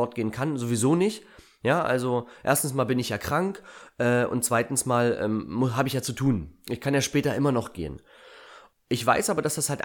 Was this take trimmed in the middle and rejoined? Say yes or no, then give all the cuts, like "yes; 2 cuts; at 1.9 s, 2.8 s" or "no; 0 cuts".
no; 0 cuts